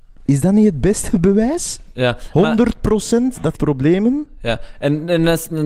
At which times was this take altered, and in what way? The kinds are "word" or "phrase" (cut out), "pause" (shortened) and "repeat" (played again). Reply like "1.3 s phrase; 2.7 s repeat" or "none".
3.5 s phrase